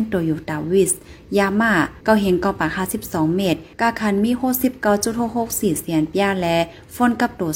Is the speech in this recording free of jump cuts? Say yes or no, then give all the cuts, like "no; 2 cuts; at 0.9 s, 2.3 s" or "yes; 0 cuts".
no; 1 cut; at 3.7 s